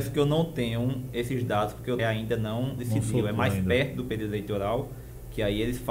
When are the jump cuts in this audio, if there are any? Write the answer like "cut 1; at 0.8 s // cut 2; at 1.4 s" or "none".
cut 1; at 2.0 s // cut 2; at 2.8 s